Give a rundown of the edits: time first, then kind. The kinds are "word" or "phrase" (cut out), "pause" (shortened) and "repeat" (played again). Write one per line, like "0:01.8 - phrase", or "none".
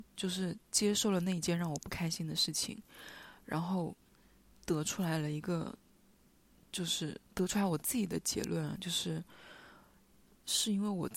0:07.3 - pause